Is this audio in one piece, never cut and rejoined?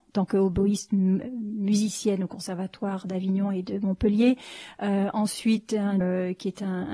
no; 1 cut; at 6.0 s

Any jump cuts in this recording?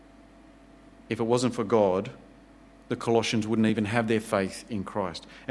no; 0 cuts

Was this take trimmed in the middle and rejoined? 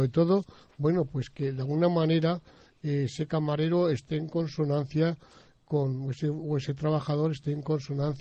no; 0 cuts

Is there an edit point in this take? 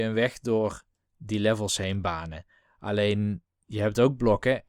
no; 0 cuts

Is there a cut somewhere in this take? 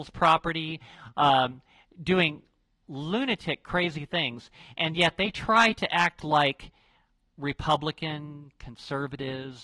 no; 0 cuts

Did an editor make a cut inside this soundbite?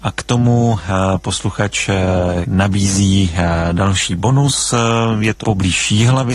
yes; 2 cuts; at 2.4 s, 5.4 s

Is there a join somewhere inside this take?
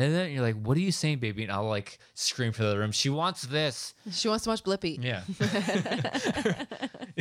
no; 0 cuts

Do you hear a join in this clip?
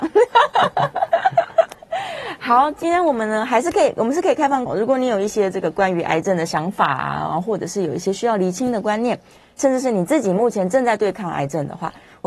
yes; 1 cut; at 4.7 s

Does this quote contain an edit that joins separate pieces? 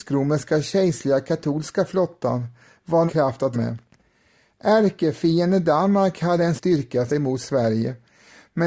yes; 4 cuts; at 3.1 s, 3.5 s, 6.6 s, 7.1 s

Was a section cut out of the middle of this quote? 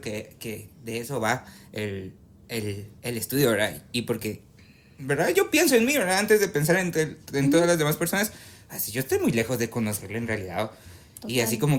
no; 0 cuts

